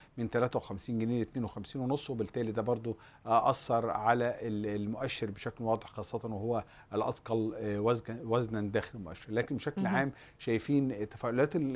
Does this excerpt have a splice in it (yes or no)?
no